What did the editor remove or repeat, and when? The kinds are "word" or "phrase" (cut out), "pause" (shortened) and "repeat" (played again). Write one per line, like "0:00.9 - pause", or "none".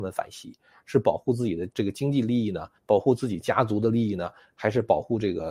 0:01.7 - pause
0:02.8 - pause